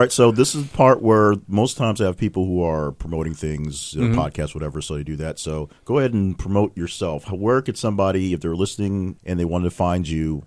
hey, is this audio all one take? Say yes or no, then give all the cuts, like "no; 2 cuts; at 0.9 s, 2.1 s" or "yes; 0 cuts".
no; 2 cuts; at 5.8 s, 9.2 s